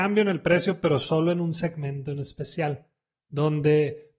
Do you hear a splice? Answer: no; 0 cuts

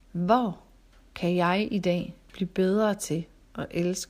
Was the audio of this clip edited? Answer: no; 0 cuts

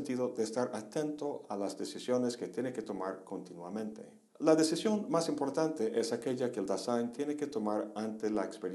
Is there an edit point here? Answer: yes; 1 cut; at 4.3 s

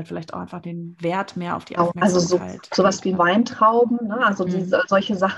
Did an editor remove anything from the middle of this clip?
yes; 1 cut; at 3.2 s

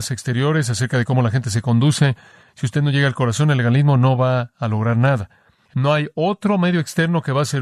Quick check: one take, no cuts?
yes; 0 cuts

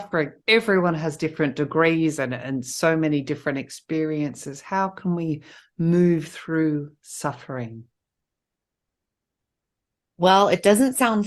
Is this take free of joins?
yes; 0 cuts

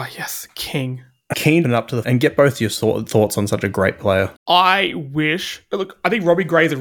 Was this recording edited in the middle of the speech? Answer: yes; 4 cuts; at 1.3 s, 1.6 s, 2.0 s, 4.4 s

